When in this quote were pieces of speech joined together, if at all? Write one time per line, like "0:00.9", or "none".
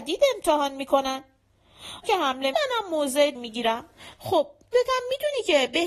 0:02.0
0:02.5
0:03.3
0:04.7